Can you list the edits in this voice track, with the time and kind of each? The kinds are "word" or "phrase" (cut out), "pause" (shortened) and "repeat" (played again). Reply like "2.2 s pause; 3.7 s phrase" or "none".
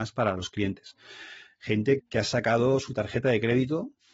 2.0 s word